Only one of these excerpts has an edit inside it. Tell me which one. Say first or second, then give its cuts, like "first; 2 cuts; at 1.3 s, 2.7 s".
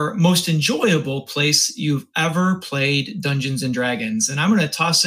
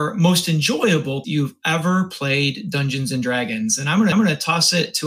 second; 2 cuts; at 1.2 s, 4.1 s